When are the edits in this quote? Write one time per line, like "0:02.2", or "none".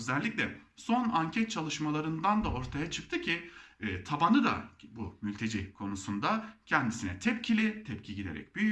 none